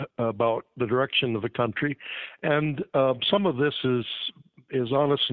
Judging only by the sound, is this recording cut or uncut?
uncut